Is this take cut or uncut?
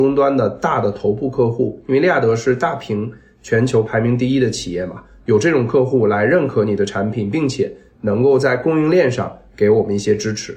uncut